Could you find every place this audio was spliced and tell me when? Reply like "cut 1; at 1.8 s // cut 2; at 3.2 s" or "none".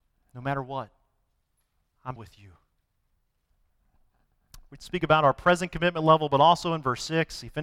cut 1; at 2.2 s